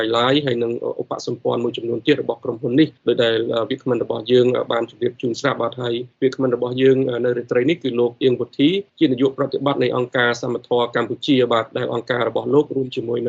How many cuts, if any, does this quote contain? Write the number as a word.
three